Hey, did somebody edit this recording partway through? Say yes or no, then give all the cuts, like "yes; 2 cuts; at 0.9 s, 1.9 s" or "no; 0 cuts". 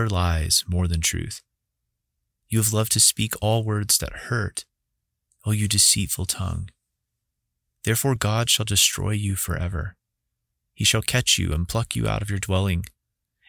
no; 0 cuts